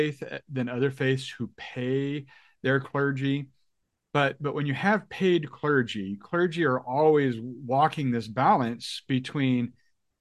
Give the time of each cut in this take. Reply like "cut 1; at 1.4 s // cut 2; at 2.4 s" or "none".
none

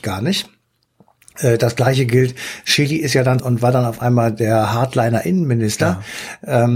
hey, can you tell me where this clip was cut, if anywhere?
cut 1; at 3.4 s

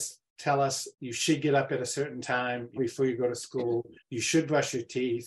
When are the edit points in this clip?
cut 1; at 0.9 s // cut 2; at 2.8 s // cut 3; at 4.0 s

